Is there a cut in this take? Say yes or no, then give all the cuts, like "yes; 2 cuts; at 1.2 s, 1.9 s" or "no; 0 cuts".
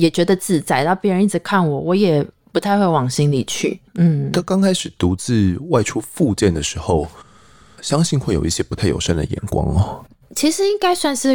no; 0 cuts